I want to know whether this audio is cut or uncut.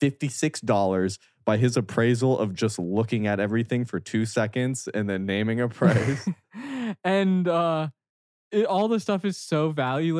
uncut